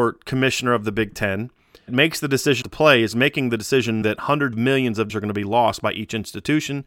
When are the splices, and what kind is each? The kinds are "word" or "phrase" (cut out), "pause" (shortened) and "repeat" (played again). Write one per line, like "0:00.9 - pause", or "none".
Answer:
0:01.9 - word
0:02.6 - word
0:04.0 - word
0:04.5 - word
0:05.1 - word

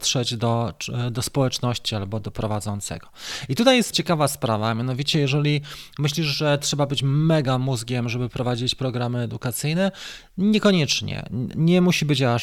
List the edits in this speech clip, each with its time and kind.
0:03.9 - word

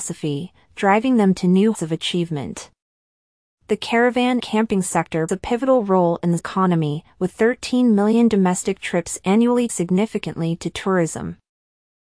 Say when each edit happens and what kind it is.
0:01.7 - word
0:04.4 - word
0:05.3 - word
0:06.4 - word
0:07.3 - word
0:09.7 - word

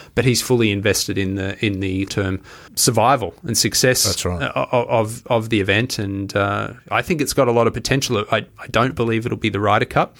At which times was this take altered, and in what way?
0:02.1 - word
0:02.7 - word
0:06.8 - pause

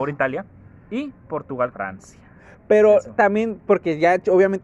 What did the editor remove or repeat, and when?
0:01.7 - word

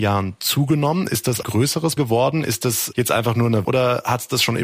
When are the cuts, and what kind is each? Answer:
0:01.4 - word
0:02.0 - word
0:02.9 - word
0:03.6 - word

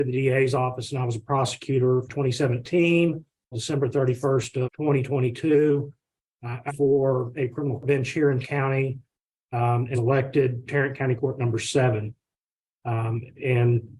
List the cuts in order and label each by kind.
0:02.1 - word
0:03.5 - word
0:04.6 - word
0:06.7 - word
0:07.8 - word
0:08.4 - word
0:09.9 - word
0:10.6 - word
0:11.2 - word

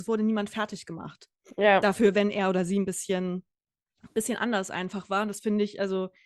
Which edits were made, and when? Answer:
none

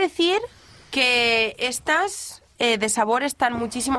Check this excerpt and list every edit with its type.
none

